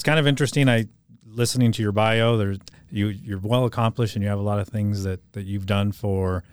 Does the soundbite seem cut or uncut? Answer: uncut